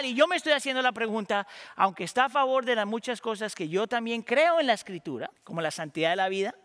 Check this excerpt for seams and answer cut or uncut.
cut